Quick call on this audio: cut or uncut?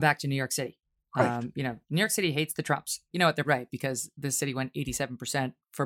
cut